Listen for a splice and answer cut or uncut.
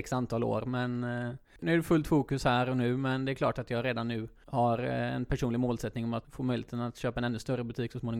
uncut